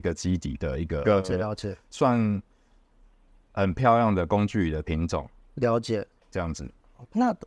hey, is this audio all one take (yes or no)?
no